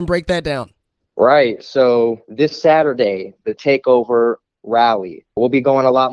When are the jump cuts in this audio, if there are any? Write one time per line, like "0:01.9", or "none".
0:03.6